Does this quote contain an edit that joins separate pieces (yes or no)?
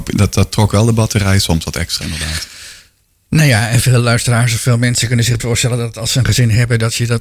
yes